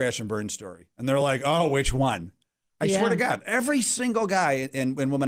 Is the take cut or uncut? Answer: uncut